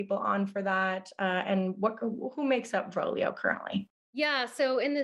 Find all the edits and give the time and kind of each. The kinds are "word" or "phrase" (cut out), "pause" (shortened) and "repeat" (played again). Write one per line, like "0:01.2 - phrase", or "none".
0:03.9 - pause

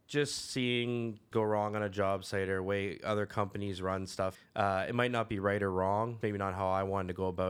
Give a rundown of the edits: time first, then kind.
0:01.3 - word
0:06.2 - word

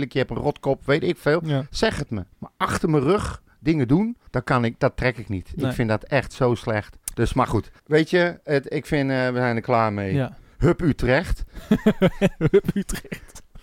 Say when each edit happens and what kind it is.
0:02.3 - pause
0:04.3 - pause
0:07.0 - pause
0:07.8 - pause

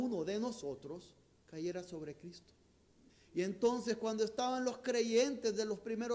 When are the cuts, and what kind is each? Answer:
0:01.3 - pause
0:03.1 - pause

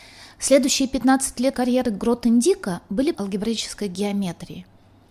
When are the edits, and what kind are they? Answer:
0:01.5 - word
0:03.1 - word

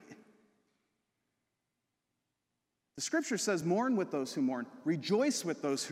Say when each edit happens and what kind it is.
none

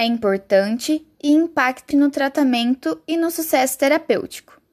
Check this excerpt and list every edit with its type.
0:01.9 - word

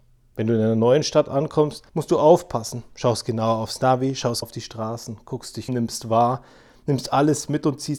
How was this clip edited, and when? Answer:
0:01.9 - pause
0:04.4 - word
0:05.7 - word

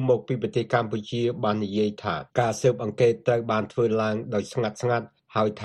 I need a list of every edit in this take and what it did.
0:02.3 - pause

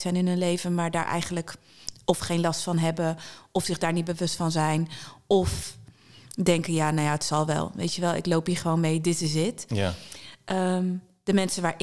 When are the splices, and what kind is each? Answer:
none

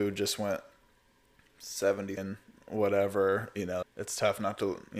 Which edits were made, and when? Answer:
0:02.2 - word
0:03.8 - word

